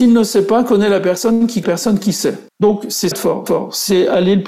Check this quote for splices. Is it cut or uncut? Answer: cut